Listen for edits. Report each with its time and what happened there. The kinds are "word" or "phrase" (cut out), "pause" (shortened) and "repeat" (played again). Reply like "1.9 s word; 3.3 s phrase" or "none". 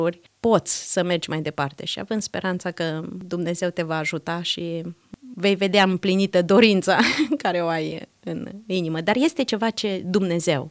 none